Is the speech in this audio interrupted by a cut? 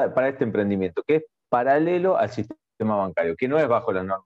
no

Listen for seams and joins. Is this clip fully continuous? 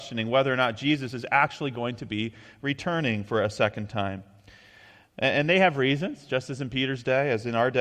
yes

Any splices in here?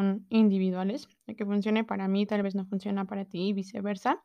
no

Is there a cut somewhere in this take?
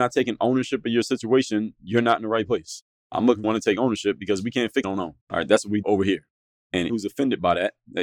yes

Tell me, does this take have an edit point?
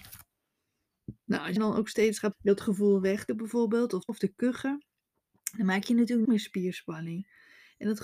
yes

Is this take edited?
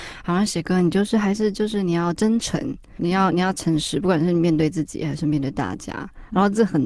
yes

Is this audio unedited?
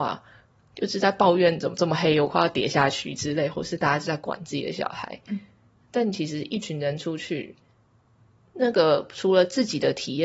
yes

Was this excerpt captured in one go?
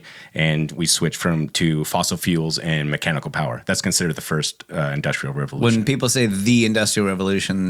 yes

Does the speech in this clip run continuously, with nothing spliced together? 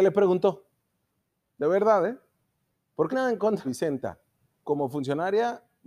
no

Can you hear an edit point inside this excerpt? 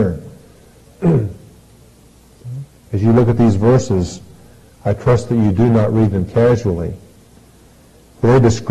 no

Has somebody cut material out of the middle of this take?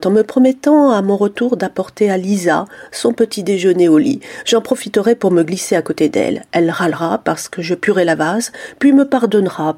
no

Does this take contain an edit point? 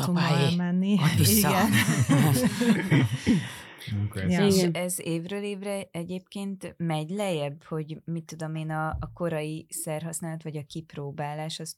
no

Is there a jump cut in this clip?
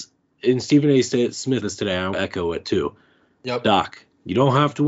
yes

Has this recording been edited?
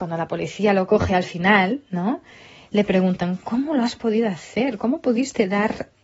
no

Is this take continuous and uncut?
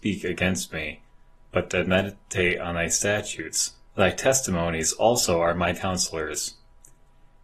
no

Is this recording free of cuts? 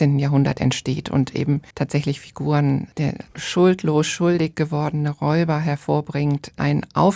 no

